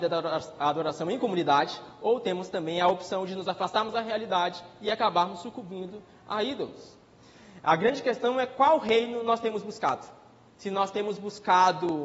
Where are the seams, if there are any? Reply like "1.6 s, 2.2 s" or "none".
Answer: none